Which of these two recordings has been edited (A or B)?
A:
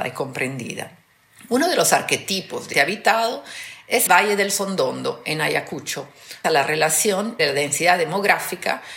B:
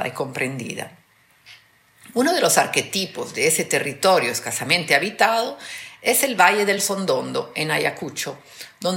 A